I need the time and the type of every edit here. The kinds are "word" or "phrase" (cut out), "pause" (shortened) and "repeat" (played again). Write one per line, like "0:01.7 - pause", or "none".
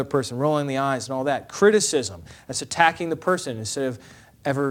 none